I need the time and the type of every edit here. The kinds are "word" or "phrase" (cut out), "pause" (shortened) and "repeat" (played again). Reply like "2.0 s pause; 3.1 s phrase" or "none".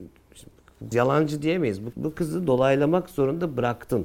0.9 s word; 1.9 s word